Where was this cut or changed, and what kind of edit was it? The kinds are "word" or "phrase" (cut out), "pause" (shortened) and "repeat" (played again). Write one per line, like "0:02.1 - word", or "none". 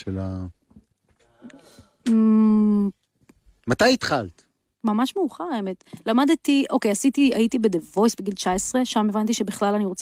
none